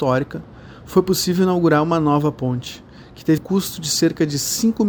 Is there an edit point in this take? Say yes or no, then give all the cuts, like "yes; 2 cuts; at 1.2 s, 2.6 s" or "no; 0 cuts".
yes; 1 cut; at 3.4 s